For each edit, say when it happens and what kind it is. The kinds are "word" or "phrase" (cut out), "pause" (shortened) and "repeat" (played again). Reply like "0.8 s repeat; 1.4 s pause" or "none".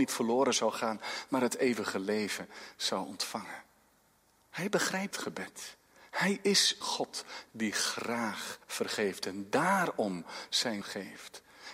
5.1 s word; 6.8 s word; 8.6 s pause; 10.8 s word